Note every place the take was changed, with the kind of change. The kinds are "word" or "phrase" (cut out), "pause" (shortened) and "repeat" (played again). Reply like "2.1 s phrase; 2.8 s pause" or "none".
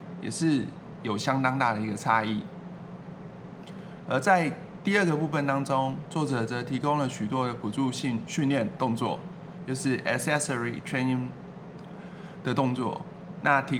none